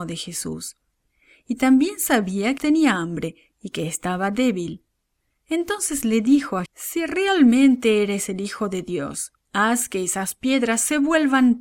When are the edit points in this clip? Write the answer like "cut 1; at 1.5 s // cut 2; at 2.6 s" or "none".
cut 1; at 2.6 s // cut 2; at 6.7 s // cut 3; at 9.4 s